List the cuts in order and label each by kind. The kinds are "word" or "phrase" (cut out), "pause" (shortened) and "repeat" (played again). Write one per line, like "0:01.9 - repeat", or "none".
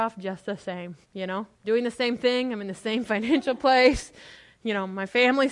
0:01.0 - pause
0:01.5 - pause